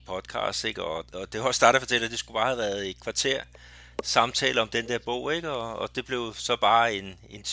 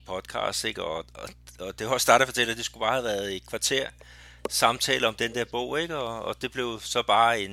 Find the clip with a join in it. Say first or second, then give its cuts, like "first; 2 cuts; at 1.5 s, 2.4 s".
first; 1 cut; at 1.1 s